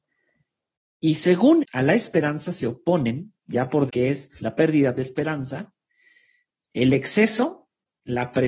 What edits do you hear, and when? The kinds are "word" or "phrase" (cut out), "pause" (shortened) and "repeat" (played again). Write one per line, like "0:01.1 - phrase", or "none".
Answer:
0:01.6 - word
0:03.4 - word
0:03.9 - phrase
0:04.4 - pause
0:05.0 - word